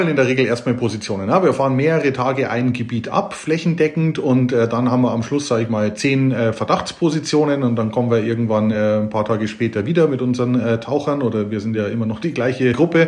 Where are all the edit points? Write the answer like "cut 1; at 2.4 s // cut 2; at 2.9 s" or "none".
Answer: none

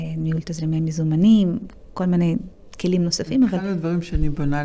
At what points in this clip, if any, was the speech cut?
none

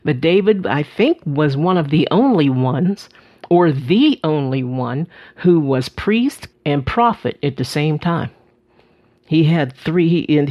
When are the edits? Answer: cut 1; at 6.5 s

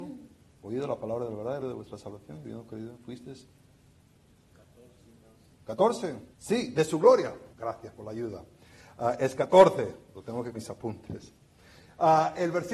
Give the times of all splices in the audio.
cut 1; at 1.6 s // cut 2; at 6.3 s // cut 3; at 7.5 s // cut 4; at 10.5 s

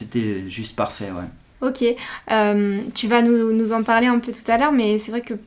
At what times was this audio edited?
none

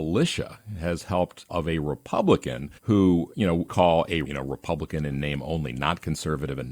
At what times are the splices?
cut 1; at 1.5 s // cut 2; at 2.8 s // cut 3; at 3.7 s // cut 4; at 4.2 s

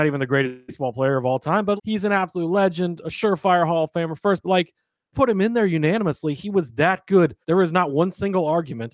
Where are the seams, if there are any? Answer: cut 1; at 1.8 s // cut 2; at 5.1 s // cut 3; at 7.4 s

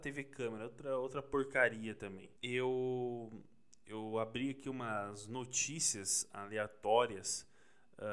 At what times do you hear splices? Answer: cut 1; at 2.4 s

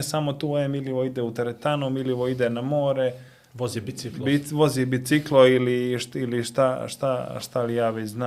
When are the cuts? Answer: none

